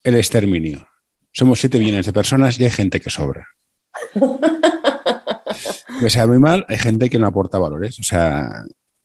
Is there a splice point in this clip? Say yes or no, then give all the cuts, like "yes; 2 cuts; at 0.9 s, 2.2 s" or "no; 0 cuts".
no; 0 cuts